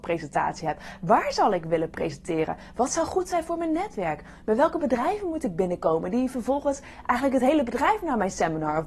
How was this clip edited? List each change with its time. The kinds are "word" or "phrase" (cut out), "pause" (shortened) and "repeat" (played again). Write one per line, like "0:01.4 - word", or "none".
none